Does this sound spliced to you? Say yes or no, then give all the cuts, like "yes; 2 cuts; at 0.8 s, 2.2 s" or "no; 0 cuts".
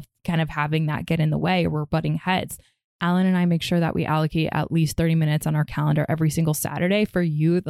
no; 0 cuts